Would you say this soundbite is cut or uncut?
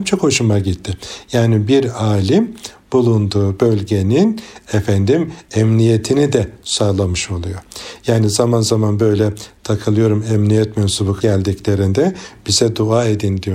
cut